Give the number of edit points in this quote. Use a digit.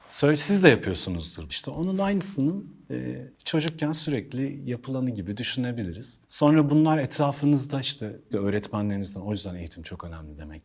4